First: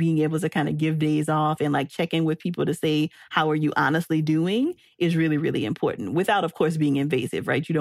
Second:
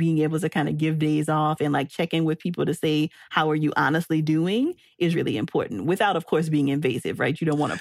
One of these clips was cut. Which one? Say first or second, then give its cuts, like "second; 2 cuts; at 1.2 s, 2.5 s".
second; 1 cut; at 5.1 s